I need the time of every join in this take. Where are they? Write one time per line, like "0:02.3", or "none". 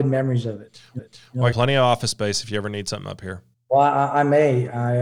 0:01.0
0:01.5
0:03.5